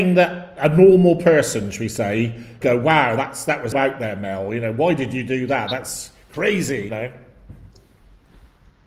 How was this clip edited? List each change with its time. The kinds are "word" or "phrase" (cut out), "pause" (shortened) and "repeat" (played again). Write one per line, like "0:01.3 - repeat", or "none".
0:02.6 - word
0:03.7 - word
0:06.9 - word